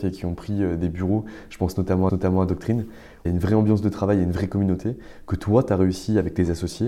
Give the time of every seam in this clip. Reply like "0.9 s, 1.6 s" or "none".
2.1 s, 3.3 s